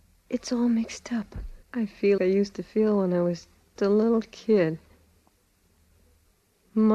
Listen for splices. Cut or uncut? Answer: cut